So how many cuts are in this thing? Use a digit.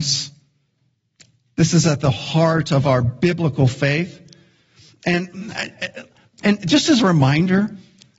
0